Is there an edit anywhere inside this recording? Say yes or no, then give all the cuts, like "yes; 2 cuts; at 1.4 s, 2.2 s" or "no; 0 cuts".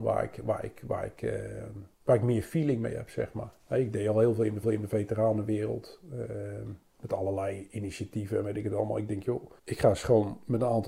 yes; 3 cuts; at 1.9 s, 4.6 s, 9.6 s